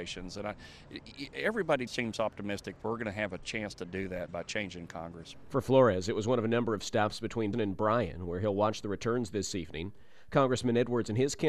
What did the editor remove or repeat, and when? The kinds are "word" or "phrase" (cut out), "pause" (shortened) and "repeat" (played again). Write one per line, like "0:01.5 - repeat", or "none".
0:01.9 - word
0:04.3 - word
0:07.5 - word